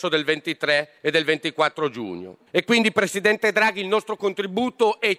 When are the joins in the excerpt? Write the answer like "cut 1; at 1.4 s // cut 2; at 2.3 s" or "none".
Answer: cut 1; at 1.0 s // cut 2; at 2.5 s